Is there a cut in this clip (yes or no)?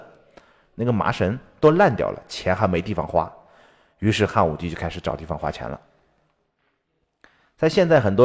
no